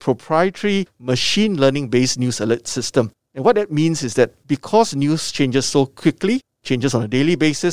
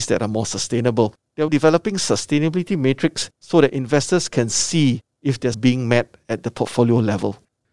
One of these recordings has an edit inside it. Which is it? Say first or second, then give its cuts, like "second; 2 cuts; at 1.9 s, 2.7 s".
second; 2 cuts; at 1.5 s, 5.5 s